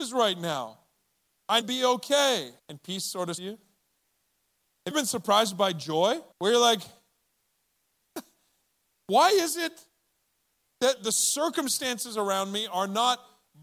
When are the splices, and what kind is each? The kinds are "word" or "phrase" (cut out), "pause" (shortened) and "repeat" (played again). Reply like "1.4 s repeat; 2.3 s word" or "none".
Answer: 1.6 s phrase; 2.6 s pause; 3.4 s word; 4.9 s phrase; 6.3 s pause; 11.0 s word